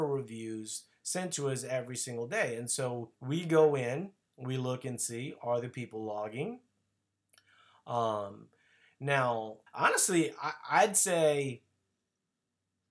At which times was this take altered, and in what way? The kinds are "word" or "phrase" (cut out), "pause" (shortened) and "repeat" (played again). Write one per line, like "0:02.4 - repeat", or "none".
0:03.1 - pause
0:09.7 - pause